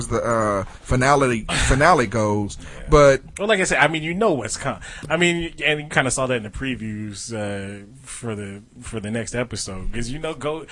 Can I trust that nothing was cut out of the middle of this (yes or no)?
yes